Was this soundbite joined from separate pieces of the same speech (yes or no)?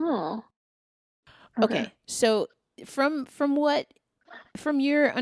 no